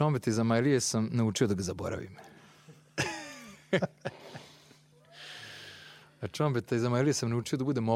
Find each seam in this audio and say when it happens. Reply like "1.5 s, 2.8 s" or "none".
none